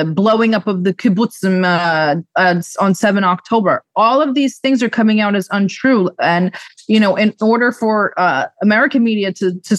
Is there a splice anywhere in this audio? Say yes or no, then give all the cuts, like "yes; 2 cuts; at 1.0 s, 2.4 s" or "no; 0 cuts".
no; 0 cuts